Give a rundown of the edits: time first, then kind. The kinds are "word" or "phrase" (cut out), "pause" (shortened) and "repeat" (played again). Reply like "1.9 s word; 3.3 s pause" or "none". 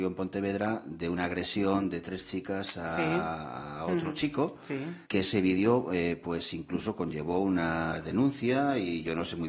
5.0 s pause